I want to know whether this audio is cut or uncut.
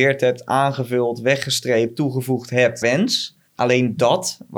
cut